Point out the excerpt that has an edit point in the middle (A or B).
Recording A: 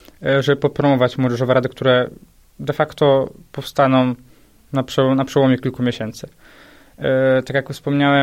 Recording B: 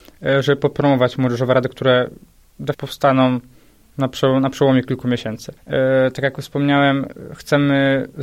B